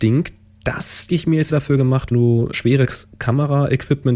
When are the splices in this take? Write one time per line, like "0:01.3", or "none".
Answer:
0:01.1
0:01.5
0:02.1
0:02.5